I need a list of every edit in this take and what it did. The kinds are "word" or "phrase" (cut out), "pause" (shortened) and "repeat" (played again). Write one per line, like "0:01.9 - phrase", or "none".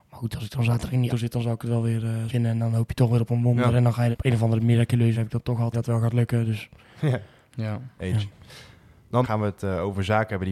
0:01.1 - word
0:02.3 - word
0:04.1 - word
0:05.1 - word
0:05.7 - word
0:09.2 - word